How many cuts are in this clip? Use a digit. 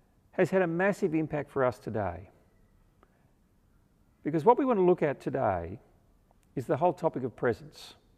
0